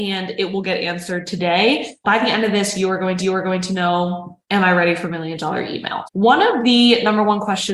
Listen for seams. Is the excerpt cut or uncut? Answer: cut